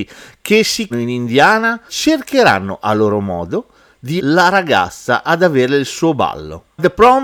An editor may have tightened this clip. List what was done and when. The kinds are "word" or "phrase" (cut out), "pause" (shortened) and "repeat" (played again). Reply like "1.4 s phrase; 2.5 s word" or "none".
0.9 s word; 1.9 s word; 4.2 s word